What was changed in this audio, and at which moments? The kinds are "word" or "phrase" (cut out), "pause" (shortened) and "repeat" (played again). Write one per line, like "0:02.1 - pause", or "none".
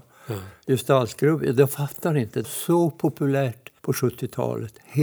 0:02.4 - word
0:03.8 - pause

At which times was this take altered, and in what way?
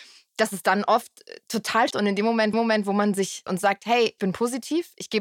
0:01.9 - word
0:02.5 - repeat
0:03.5 - word
0:04.2 - word

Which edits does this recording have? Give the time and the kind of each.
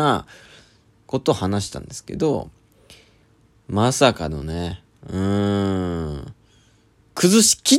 none

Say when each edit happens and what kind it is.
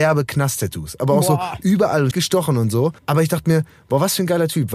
0:02.1 - word
0:03.0 - pause

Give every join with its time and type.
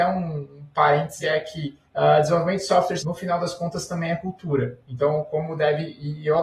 0:01.2 - word
0:01.9 - pause
0:03.0 - word

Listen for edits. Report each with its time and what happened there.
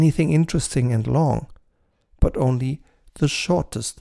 none

